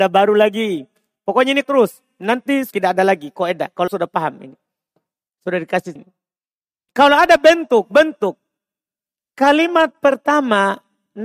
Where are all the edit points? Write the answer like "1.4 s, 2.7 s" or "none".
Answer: 1.6 s, 2.7 s, 3.9 s, 6.0 s